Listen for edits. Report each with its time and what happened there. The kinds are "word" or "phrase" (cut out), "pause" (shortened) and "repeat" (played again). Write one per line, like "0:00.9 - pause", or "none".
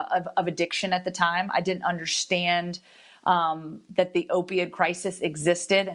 none